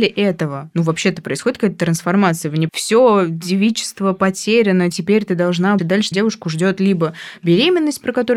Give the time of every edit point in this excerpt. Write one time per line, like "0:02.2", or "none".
0:02.7
0:05.8
0:06.1